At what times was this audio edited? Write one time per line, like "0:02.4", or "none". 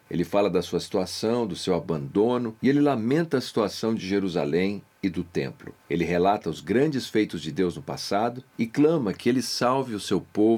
none